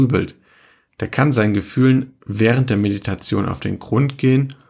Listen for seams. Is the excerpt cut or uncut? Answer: uncut